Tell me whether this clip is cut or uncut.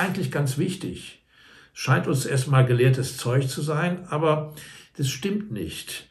uncut